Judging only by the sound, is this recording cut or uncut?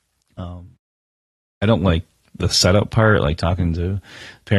uncut